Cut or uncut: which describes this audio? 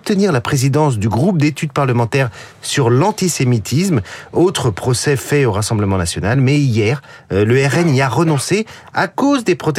uncut